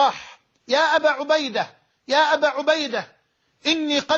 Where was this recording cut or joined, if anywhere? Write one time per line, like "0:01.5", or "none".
none